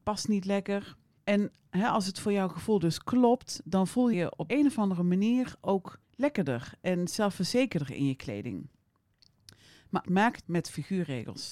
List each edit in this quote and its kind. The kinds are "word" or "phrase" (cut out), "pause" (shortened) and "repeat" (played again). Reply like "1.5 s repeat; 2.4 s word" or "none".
1.2 s pause; 4.1 s word; 4.5 s word; 6.0 s pause; 10.0 s word; 10.4 s phrase